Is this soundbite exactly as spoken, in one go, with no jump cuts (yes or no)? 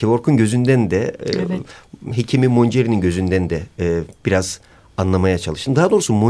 yes